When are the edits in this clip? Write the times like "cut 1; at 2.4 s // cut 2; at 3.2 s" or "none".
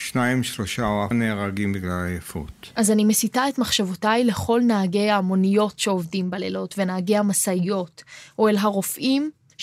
cut 1; at 1.1 s